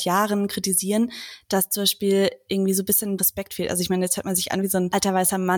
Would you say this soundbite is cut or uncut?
cut